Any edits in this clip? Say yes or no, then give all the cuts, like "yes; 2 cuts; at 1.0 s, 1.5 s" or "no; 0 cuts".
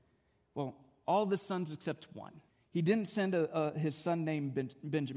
yes; 1 cut; at 2.5 s